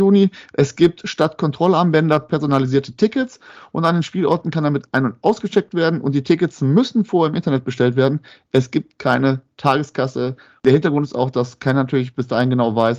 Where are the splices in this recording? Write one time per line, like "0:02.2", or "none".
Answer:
none